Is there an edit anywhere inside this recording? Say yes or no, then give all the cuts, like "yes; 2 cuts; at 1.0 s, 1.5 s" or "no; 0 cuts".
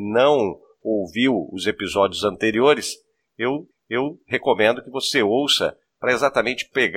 yes; 1 cut; at 3.7 s